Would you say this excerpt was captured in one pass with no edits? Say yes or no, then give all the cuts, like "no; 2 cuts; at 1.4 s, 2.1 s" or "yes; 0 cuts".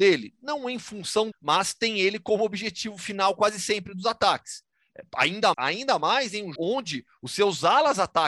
no; 3 cuts; at 1.3 s, 5.5 s, 6.6 s